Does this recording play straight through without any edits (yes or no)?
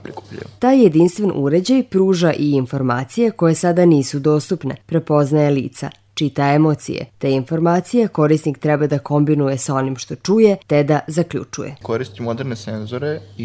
no